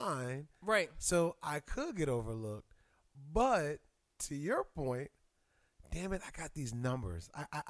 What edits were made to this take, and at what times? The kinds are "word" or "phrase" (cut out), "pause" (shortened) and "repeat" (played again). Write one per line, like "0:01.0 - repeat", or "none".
none